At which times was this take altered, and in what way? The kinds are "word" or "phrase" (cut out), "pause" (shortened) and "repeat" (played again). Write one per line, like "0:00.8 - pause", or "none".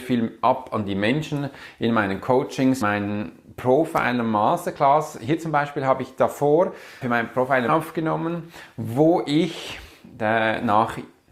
0:02.8 - phrase
0:07.0 - word
0:07.7 - phrase

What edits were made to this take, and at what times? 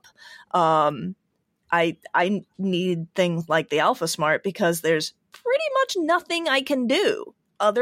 none

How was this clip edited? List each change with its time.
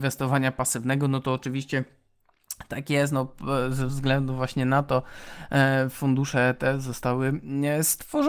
none

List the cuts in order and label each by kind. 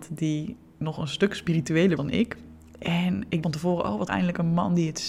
0:02.0 - word
0:03.4 - word
0:04.1 - word

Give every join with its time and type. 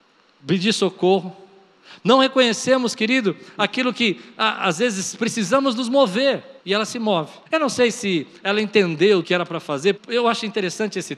0:06.6 - pause
0:07.5 - pause
0:09.2 - word
0:10.0 - word

